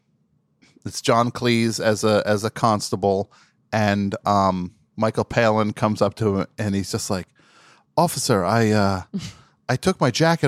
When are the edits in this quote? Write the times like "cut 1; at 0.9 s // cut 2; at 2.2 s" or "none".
none